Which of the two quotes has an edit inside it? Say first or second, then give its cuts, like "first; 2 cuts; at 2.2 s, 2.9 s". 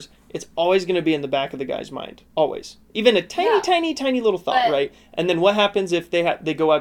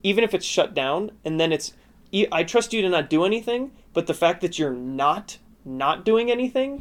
first; 1 cut; at 2.3 s